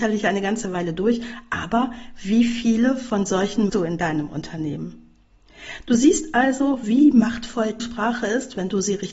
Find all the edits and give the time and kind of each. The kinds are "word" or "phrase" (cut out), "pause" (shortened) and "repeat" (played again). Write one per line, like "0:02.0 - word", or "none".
0:03.7 - phrase
0:07.8 - word